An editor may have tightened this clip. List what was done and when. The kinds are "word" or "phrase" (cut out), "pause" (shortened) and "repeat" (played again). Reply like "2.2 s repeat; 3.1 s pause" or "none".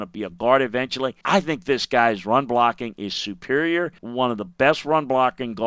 1.2 s pause; 4.0 s pause